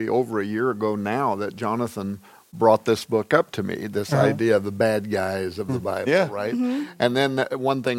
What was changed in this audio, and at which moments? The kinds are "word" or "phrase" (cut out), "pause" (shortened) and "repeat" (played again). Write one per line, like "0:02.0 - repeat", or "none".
none